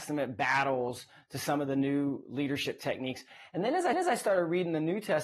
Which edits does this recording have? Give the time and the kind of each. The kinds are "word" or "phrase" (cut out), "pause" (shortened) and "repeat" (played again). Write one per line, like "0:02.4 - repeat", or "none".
0:03.9 - repeat